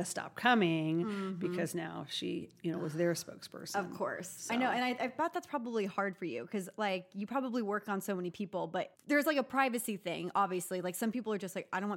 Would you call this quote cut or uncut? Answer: uncut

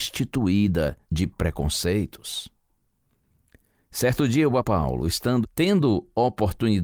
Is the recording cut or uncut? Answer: cut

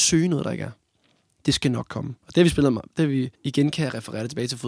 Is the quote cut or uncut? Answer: cut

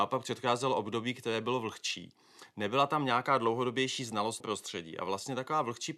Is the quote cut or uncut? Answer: cut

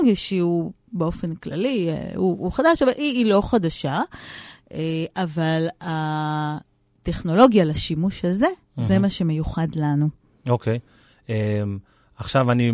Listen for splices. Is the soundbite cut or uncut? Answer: uncut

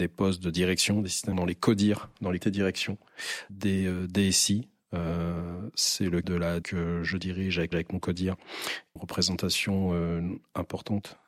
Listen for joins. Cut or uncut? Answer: cut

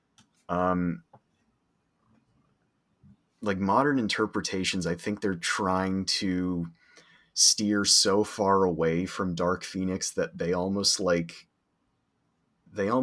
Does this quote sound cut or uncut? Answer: uncut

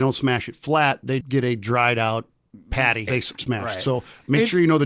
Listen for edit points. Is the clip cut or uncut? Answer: cut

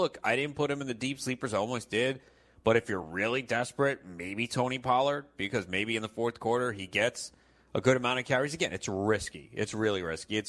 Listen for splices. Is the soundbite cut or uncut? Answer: uncut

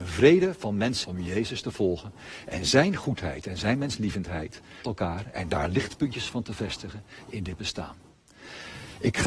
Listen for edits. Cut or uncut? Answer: cut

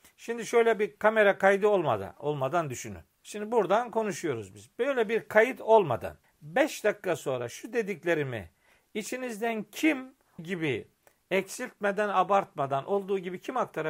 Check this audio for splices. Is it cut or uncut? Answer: cut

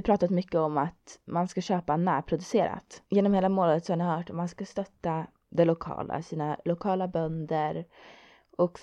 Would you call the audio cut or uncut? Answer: cut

